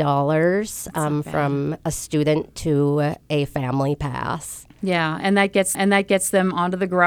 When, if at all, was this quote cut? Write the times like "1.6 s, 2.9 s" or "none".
5.7 s